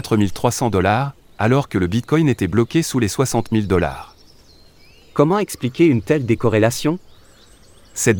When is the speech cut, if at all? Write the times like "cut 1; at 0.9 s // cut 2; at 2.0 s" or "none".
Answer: none